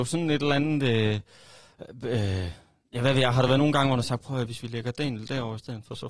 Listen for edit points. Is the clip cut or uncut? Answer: uncut